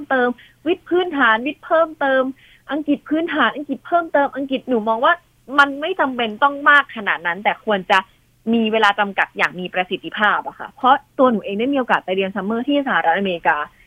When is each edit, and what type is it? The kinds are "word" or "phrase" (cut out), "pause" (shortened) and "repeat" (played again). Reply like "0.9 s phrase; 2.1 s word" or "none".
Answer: 4.6 s word